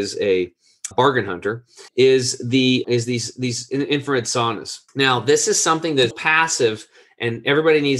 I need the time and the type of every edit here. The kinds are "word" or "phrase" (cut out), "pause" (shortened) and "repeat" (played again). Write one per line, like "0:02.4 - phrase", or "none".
0:00.9 - word
0:01.9 - pause
0:02.8 - word
0:04.9 - pause
0:06.1 - word